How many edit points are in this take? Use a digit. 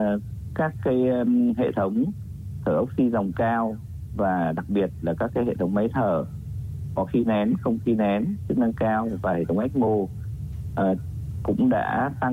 0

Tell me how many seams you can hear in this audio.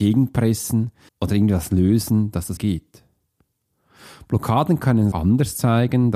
3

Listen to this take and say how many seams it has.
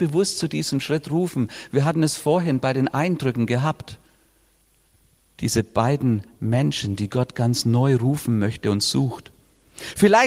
0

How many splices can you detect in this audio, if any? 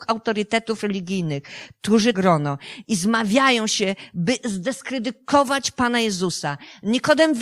1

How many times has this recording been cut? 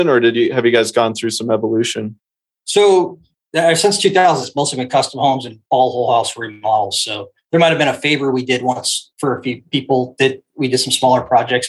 2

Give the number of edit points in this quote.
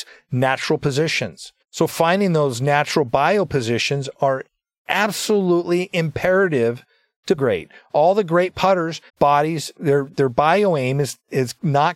3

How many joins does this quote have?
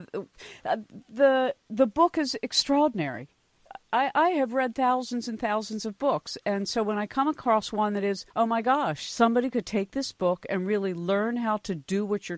1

